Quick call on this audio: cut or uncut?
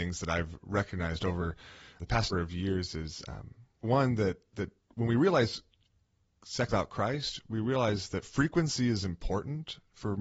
cut